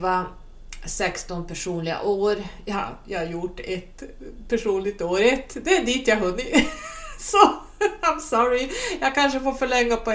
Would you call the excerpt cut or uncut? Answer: uncut